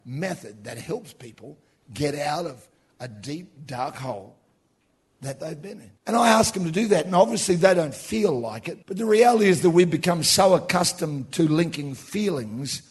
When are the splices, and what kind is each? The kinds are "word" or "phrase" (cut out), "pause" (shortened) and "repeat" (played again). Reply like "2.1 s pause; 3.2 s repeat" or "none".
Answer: 6.0 s pause; 8.8 s pause